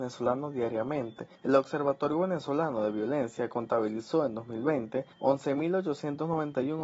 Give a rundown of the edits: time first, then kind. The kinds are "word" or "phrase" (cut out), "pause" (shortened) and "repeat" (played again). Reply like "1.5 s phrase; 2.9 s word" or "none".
1.3 s pause; 5.1 s pause